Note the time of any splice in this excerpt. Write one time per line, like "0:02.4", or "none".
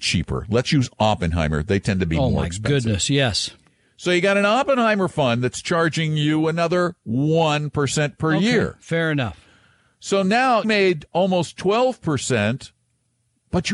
0:10.6